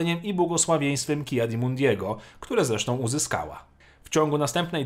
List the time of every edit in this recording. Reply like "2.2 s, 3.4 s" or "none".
none